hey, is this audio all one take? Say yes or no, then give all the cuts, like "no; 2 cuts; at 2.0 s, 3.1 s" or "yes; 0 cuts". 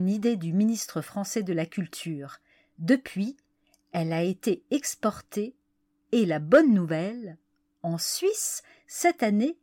yes; 0 cuts